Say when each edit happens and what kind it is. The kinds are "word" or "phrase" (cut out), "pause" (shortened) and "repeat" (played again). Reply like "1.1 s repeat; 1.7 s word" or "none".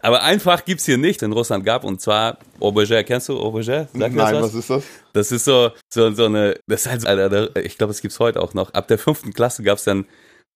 1.2 s phrase; 5.8 s pause; 6.6 s pause; 7.0 s word